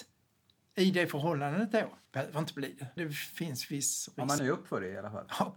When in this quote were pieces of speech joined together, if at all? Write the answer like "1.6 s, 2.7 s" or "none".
2.1 s, 3.0 s, 4.4 s